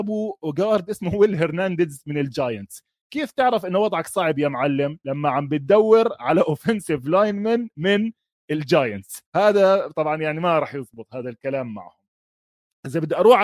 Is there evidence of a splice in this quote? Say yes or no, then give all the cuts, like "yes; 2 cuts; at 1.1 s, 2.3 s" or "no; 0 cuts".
yes; 1 cut; at 9.3 s